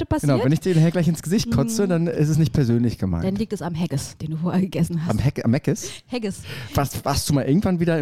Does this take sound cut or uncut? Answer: uncut